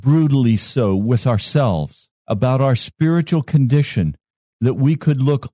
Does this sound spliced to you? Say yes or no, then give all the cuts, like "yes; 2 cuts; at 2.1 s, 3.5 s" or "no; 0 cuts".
yes; 1 cut; at 2.2 s